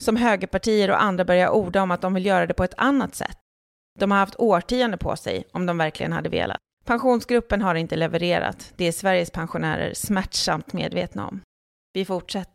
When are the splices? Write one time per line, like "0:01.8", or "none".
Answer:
none